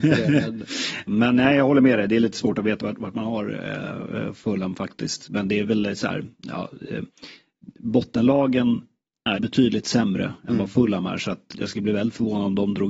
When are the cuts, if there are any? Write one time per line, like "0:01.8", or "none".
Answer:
0:01.1
0:02.8
0:09.3
0:11.5